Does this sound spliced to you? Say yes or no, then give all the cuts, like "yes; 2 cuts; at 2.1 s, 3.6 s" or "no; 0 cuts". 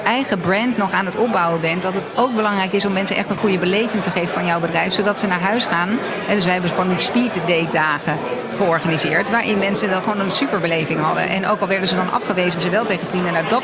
yes; 1 cut; at 12.5 s